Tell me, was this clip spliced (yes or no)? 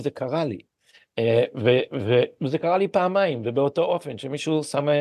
no